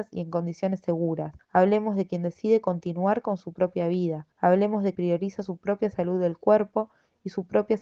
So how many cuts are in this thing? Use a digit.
3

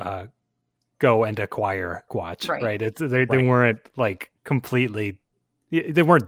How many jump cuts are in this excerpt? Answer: 2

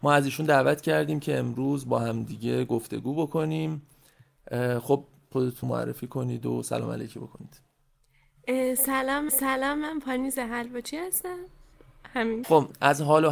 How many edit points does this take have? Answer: 4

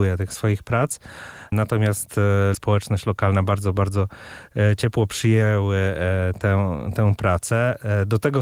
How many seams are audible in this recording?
1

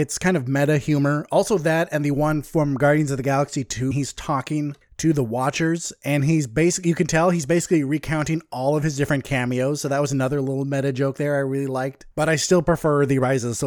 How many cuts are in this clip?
2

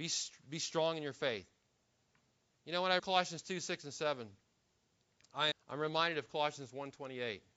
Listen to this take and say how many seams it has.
2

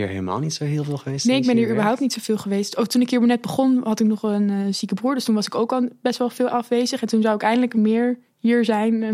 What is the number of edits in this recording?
1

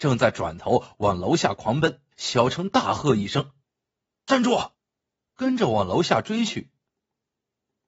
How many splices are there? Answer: 3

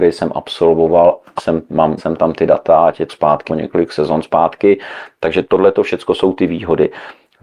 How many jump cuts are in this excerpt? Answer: 5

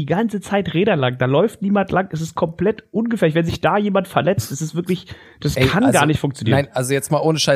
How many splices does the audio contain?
0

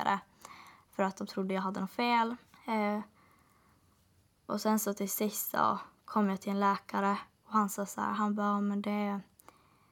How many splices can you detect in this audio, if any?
2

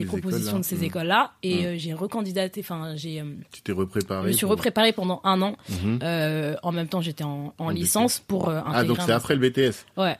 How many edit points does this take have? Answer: 0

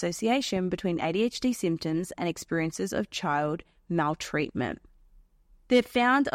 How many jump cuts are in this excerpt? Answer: 0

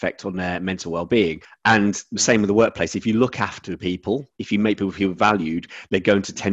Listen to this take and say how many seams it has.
2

